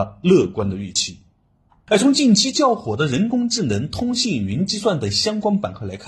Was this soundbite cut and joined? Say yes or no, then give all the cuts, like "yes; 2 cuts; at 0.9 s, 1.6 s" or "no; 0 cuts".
no; 0 cuts